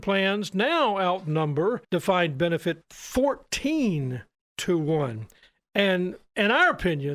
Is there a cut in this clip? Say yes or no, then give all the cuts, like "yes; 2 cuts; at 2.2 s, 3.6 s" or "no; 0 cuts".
yes; 2 cuts; at 1.8 s, 2.8 s